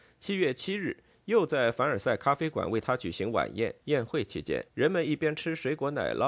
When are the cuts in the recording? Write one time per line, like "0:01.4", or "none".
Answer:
0:03.8
0:04.7